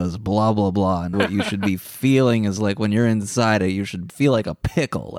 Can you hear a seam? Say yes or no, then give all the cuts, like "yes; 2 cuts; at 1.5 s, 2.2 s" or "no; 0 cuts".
yes; 1 cut; at 1.1 s